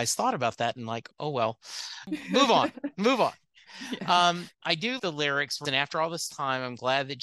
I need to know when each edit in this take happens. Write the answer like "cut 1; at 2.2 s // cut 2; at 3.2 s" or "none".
cut 1; at 1.1 s // cut 2; at 4.5 s // cut 3; at 5.0 s // cut 4; at 5.6 s